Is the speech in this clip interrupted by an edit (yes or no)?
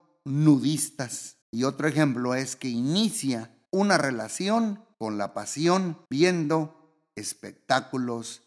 yes